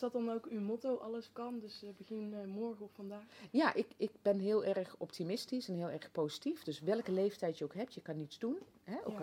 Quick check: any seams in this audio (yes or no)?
no